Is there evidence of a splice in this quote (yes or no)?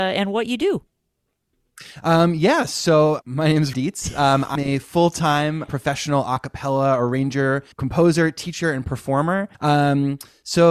yes